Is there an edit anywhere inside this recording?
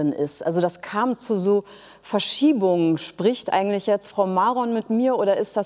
no; 0 cuts

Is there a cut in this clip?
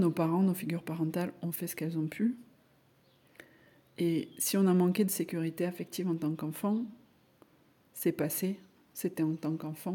no; 0 cuts

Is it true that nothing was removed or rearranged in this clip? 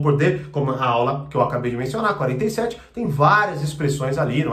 yes; 0 cuts

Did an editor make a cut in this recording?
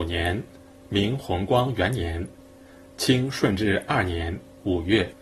no; 0 cuts

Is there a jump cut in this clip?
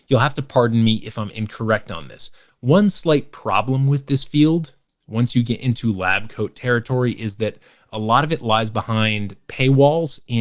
no; 0 cuts

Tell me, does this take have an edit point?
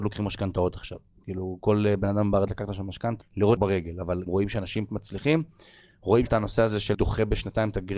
yes; 7 cuts; at 2.5 s, 3.2 s, 3.6 s, 4.3 s, 4.9 s, 6.3 s, 6.9 s

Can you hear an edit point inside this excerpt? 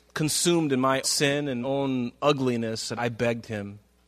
yes; 3 cuts; at 1.0 s, 1.6 s, 2.9 s

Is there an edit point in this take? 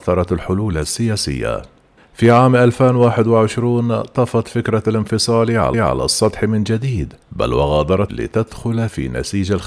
yes; 4 cuts; at 2.0 s, 5.7 s, 7.2 s, 8.1 s

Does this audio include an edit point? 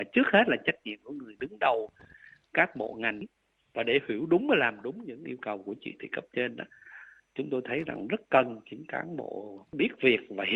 no; 0 cuts

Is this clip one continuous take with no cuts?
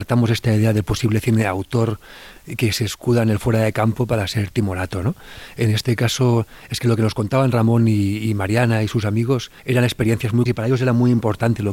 no; 2 cuts; at 9.6 s, 10.5 s

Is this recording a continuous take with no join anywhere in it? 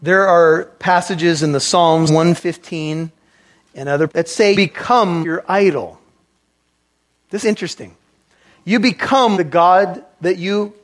no; 6 cuts; at 2.1 s, 4.1 s, 4.5 s, 5.2 s, 7.4 s, 9.3 s

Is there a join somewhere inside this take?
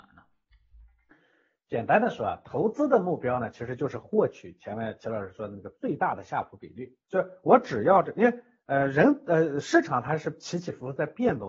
yes; 1 cut; at 7.0 s

